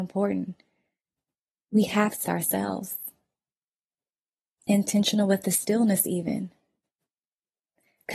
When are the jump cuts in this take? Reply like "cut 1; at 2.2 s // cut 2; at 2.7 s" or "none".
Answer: cut 1; at 2.2 s